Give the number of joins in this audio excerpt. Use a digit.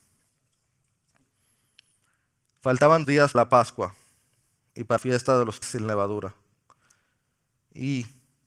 4